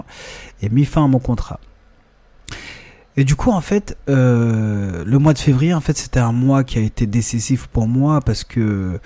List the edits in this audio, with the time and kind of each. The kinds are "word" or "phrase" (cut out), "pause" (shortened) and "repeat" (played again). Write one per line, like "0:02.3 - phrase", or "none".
none